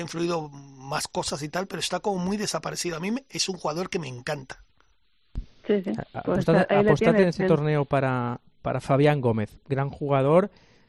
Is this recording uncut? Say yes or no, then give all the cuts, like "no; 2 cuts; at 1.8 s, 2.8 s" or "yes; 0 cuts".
yes; 0 cuts